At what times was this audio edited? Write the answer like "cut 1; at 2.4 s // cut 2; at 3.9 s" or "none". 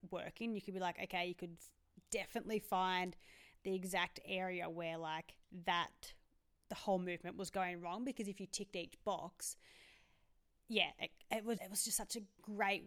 cut 1; at 5.4 s // cut 2; at 11.6 s